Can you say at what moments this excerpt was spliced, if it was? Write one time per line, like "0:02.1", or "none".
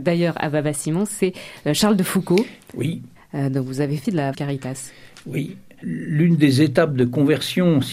0:04.0
0:04.3